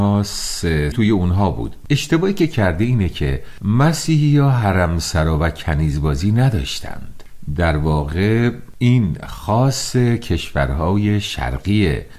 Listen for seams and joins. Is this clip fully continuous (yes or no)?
no